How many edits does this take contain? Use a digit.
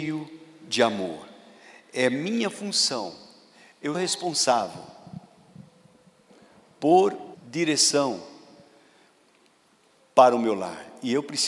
2